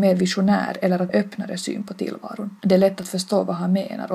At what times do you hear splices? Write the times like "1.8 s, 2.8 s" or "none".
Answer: 1.1 s, 2.6 s